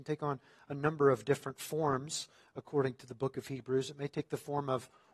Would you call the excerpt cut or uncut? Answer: uncut